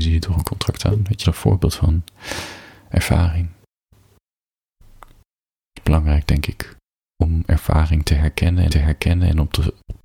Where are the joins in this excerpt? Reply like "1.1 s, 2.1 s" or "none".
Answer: 1.2 s, 8.7 s